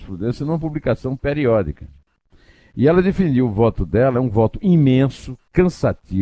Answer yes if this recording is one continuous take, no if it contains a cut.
yes